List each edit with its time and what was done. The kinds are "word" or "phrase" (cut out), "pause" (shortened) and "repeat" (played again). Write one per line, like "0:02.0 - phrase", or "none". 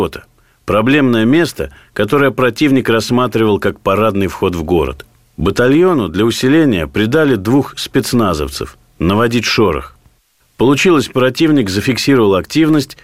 none